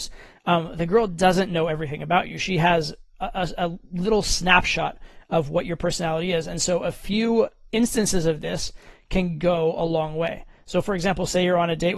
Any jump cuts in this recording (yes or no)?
no